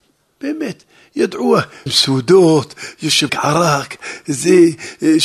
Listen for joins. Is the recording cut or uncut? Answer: cut